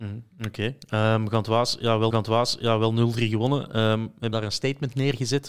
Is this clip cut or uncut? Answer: cut